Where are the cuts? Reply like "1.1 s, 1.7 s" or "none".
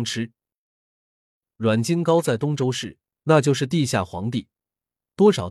none